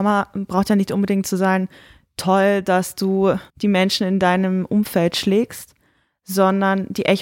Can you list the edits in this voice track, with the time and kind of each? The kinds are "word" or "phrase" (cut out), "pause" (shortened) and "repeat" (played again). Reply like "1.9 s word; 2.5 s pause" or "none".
3.5 s pause